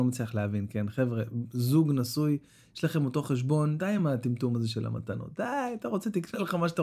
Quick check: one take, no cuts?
yes; 0 cuts

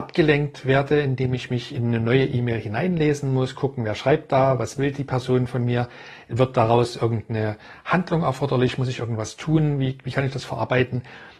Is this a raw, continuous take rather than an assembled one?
yes; 0 cuts

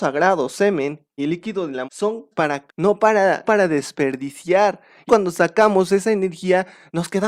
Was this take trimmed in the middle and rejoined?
yes; 6 cuts; at 1.2 s, 1.8 s, 2.3 s, 2.7 s, 3.4 s, 5.1 s

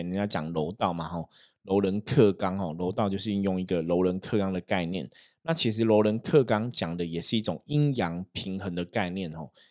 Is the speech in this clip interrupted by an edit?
no; 0 cuts

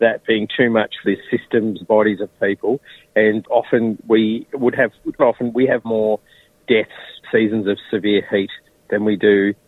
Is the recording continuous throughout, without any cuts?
no; 6 cuts; at 1.0 s, 1.8 s, 3.4 s, 5.2 s, 5.8 s, 7.2 s

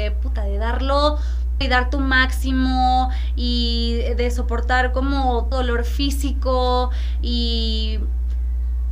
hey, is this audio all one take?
no; 2 cuts; at 1.6 s, 5.5 s

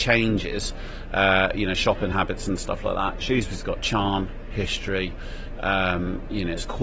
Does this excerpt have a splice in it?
no; 0 cuts

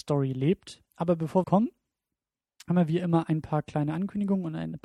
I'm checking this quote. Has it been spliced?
yes; 1 cut; at 1.4 s

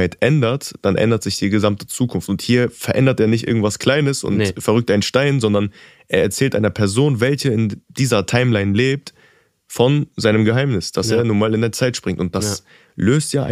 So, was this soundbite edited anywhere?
no; 0 cuts

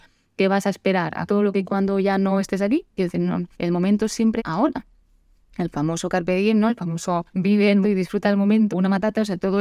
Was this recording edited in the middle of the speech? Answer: yes; 7 cuts; at 1.3 s, 1.6 s, 3.5 s, 4.4 s, 7.3 s, 7.8 s, 8.7 s

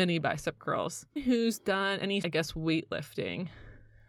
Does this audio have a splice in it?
yes; 2 cuts; at 1.2 s, 2.2 s

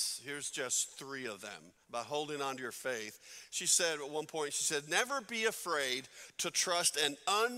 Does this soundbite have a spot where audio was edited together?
yes; 1 cut; at 1.8 s

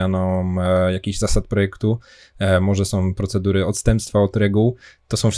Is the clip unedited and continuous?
yes; 0 cuts

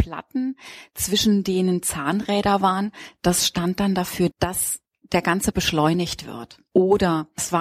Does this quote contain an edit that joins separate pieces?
yes; 2 cuts; at 4.3 s, 5.5 s

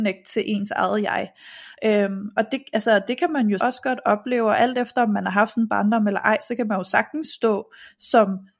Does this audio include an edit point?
yes; 1 cut; at 3.6 s

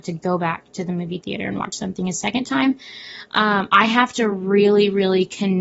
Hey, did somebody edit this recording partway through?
no; 0 cuts

